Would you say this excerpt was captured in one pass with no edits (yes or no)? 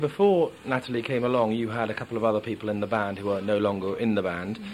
yes